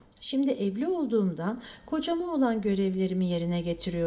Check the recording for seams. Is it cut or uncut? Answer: uncut